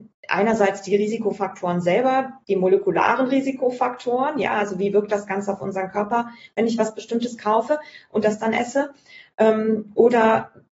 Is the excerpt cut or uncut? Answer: uncut